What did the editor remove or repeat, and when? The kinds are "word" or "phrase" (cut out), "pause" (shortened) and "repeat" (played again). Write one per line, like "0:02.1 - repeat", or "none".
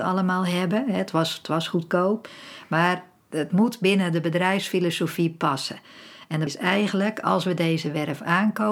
0:06.5 - word